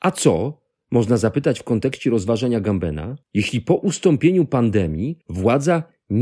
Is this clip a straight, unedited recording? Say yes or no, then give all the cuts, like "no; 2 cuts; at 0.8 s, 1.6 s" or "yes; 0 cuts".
no; 2 cuts; at 3.2 s, 5.2 s